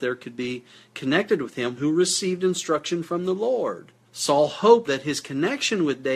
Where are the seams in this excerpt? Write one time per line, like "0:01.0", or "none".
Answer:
0:01.8
0:04.1
0:04.9